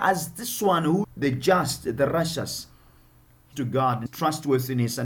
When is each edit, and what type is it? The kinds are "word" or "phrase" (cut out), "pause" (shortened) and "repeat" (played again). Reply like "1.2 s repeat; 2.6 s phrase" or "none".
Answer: 1.0 s word; 3.5 s word; 4.1 s word